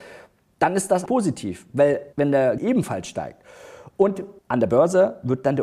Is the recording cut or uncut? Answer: cut